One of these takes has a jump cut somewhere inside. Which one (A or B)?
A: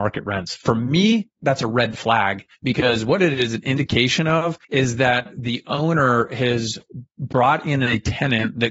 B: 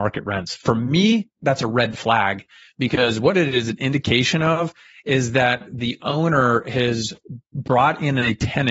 A